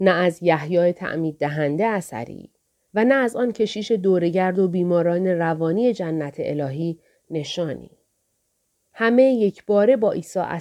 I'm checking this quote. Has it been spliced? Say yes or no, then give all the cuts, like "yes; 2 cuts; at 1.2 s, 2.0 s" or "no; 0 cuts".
no; 0 cuts